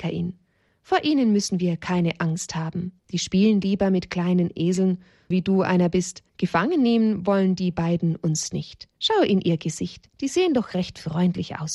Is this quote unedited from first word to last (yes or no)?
no